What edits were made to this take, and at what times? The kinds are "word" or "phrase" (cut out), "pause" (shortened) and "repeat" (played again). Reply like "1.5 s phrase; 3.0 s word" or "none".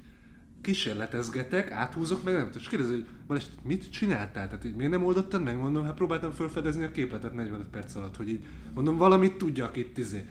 none